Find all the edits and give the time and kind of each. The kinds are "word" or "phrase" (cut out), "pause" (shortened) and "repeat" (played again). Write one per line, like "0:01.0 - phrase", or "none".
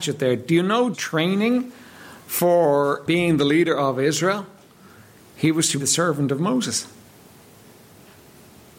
0:00.9 - word
0:03.1 - word
0:05.8 - word